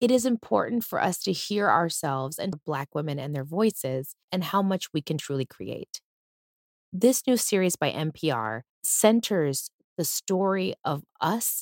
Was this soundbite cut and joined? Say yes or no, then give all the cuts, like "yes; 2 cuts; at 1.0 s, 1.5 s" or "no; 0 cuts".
yes; 2 cuts; at 2.5 s, 8.7 s